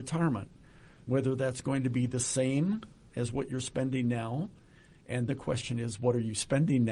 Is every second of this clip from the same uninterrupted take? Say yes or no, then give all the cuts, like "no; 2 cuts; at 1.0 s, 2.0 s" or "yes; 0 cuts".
no; 1 cut; at 5.3 s